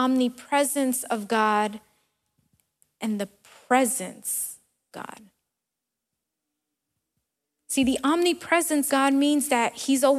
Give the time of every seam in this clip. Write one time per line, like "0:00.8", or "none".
0:04.9
0:08.9